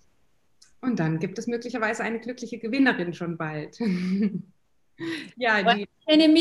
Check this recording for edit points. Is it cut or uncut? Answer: uncut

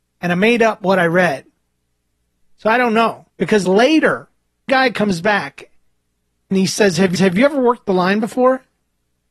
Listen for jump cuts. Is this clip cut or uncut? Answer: cut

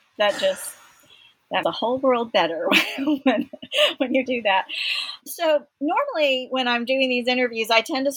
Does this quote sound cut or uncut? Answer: cut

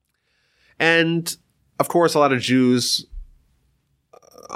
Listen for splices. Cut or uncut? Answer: cut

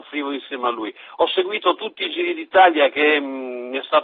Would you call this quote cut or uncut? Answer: uncut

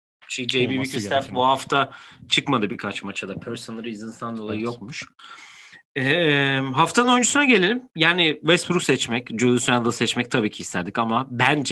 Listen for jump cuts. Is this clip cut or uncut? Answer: uncut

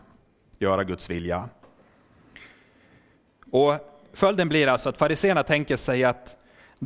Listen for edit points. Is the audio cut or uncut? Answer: uncut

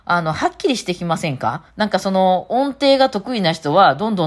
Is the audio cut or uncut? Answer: cut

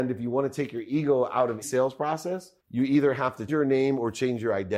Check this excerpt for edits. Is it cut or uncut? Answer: cut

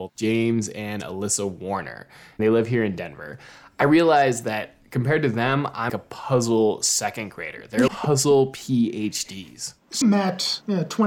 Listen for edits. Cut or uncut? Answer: cut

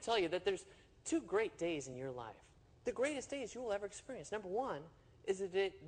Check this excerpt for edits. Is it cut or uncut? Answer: uncut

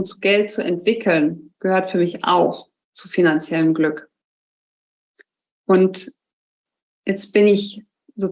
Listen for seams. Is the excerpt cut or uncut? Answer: uncut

